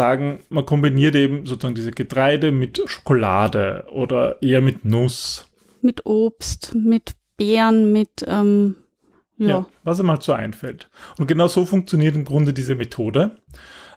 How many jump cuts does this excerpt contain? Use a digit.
1